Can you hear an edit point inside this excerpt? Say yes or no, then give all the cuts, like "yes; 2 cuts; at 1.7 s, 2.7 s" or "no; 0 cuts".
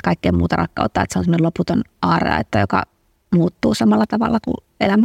no; 0 cuts